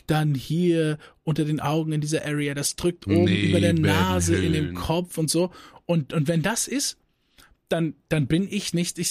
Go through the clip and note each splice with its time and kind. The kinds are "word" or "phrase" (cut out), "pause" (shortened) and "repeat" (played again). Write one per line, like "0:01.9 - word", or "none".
none